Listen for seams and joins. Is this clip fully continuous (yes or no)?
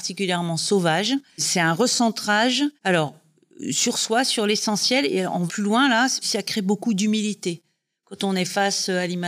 no